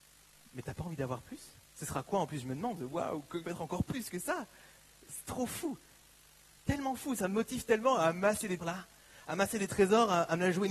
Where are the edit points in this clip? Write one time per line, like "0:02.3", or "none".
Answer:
0:01.7
0:03.4
0:08.6